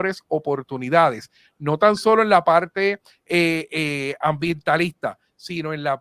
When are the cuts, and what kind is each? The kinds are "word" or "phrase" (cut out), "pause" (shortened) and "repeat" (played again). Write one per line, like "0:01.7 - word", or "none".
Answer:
none